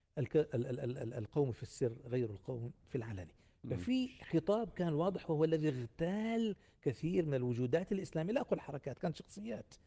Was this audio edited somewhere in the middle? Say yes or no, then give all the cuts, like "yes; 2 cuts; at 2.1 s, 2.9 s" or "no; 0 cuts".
no; 0 cuts